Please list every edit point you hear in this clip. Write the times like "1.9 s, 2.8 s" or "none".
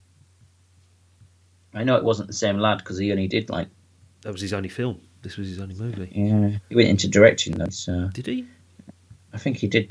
none